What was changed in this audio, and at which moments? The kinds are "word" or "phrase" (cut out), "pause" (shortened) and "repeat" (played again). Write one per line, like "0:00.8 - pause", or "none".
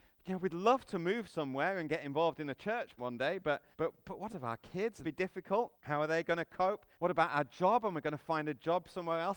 0:03.0 - word
0:03.7 - pause
0:04.3 - phrase
0:05.0 - phrase
0:05.7 - pause
0:06.9 - pause